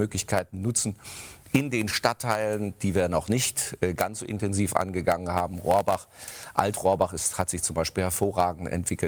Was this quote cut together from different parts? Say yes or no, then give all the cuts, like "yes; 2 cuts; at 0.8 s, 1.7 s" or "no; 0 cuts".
no; 0 cuts